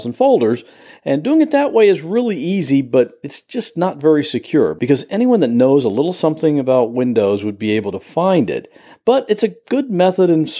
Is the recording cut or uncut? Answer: uncut